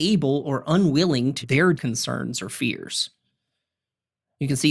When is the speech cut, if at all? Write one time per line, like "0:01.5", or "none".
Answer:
0:01.4
0:01.7